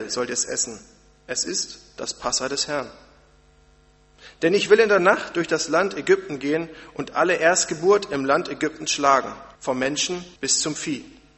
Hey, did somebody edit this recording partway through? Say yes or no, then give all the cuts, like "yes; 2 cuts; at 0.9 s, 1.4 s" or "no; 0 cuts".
yes; 2 cuts; at 9.6 s, 10.4 s